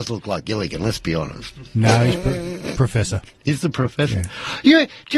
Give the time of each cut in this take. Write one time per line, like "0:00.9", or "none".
0:03.3